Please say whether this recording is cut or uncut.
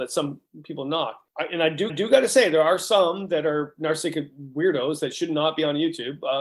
cut